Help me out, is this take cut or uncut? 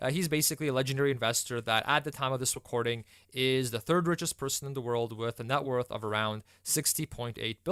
uncut